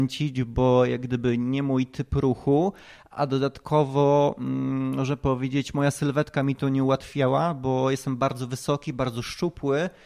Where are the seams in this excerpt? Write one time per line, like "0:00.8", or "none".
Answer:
none